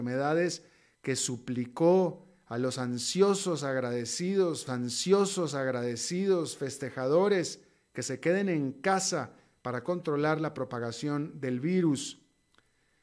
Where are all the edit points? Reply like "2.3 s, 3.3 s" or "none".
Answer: 4.7 s